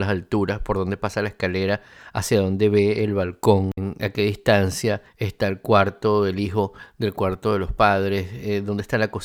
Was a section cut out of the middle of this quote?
yes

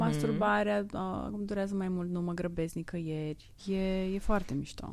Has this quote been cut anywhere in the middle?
yes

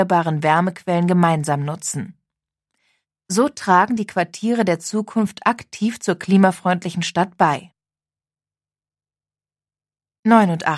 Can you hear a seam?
no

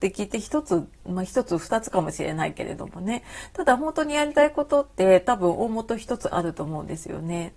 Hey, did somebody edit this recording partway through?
yes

